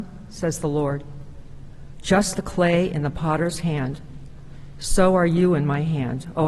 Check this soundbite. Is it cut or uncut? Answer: cut